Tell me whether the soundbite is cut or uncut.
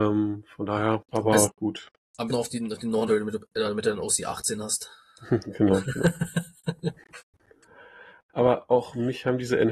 cut